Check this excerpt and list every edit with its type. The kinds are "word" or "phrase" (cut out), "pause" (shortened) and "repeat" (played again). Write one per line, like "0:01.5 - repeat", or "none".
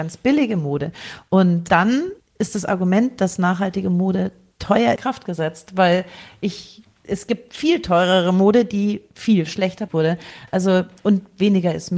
0:02.2 - pause
0:05.0 - phrase
0:07.0 - word
0:09.9 - word